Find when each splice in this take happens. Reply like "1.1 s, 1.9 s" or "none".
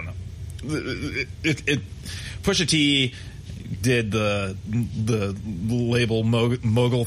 none